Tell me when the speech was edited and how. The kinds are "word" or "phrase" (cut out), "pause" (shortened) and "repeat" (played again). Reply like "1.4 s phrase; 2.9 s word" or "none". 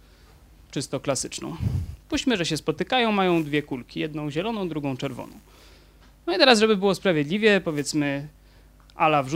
none

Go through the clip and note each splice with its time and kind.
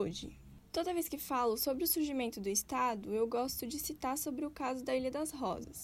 none

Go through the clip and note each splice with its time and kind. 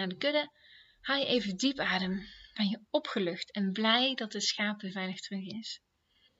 none

